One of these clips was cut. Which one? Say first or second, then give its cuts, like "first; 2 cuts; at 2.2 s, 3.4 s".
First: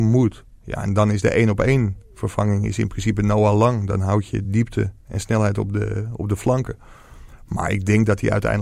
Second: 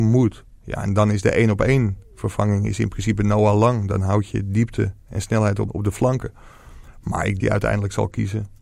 second; 2 cuts; at 5.7 s, 7.4 s